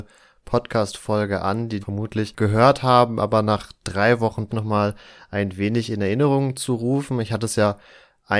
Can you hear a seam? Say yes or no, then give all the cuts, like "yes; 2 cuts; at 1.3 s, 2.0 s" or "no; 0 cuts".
yes; 2 cuts; at 1.8 s, 4.5 s